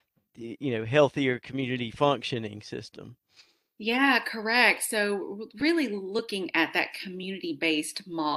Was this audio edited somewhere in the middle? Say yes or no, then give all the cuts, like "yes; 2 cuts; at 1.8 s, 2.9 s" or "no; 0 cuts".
no; 0 cuts